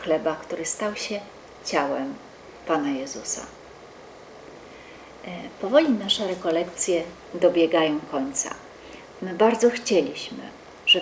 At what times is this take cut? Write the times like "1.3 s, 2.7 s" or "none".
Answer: none